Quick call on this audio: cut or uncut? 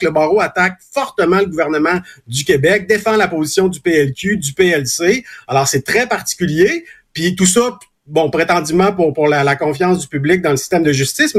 uncut